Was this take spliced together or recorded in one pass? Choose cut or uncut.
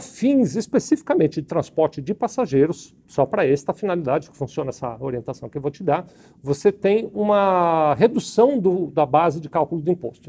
uncut